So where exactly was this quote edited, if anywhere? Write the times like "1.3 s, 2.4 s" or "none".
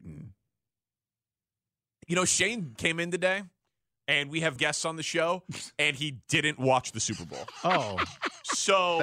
2.8 s, 4.6 s